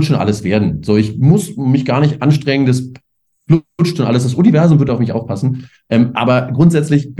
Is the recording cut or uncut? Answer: uncut